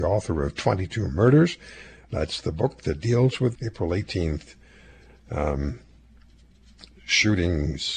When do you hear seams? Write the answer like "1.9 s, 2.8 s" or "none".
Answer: 3.6 s

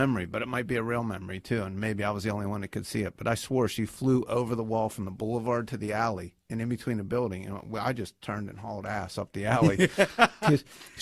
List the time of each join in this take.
none

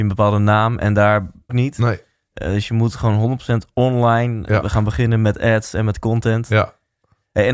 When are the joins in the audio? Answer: 1.5 s

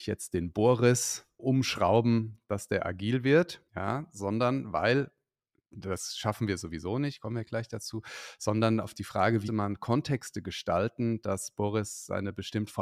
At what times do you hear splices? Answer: 1.4 s, 3.7 s, 9.5 s

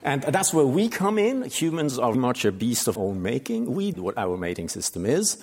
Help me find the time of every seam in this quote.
2.1 s, 3.0 s, 3.9 s

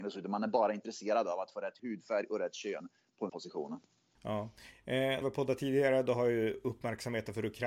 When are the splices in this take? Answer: 1.8 s, 3.3 s, 5.2 s

